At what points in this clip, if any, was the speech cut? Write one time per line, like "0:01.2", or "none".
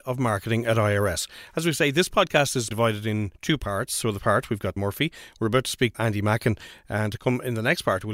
0:02.7
0:03.3
0:04.2
0:04.8
0:05.9

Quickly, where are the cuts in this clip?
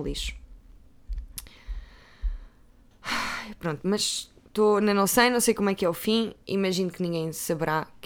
none

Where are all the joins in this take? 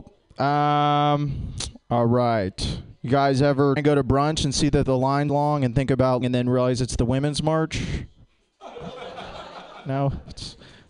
0:03.8
0:05.3
0:06.2

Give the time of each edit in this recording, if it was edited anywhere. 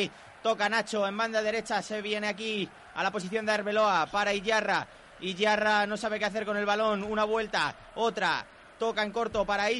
none

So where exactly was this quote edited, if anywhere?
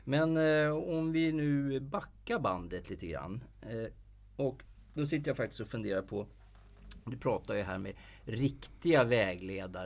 none

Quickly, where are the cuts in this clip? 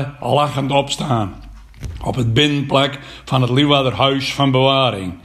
none

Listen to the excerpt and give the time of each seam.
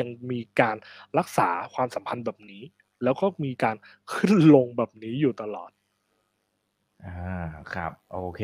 none

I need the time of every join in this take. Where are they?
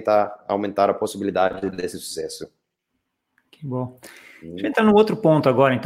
none

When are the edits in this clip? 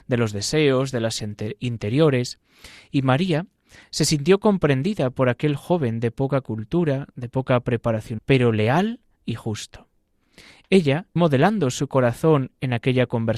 0:01.2
0:08.2
0:09.2
0:11.2

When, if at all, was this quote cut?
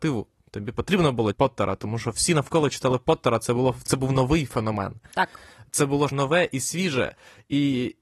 0:01.3
0:03.9
0:06.1

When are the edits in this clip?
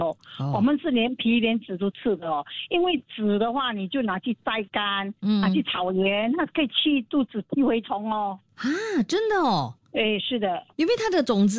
0:08.4
0:09.8

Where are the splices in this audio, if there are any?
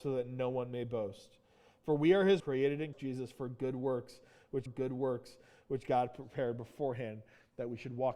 0:02.4
0:02.9
0:04.7

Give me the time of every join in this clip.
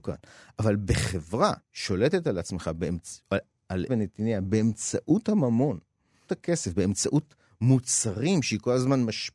0:01.6
0:03.5
0:03.9
0:06.3

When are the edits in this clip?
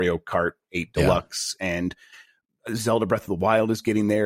none

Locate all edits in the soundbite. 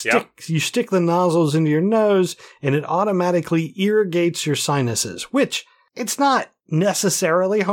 0:06.6

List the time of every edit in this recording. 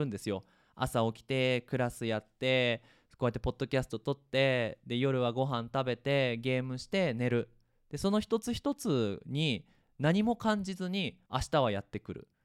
0:11.3

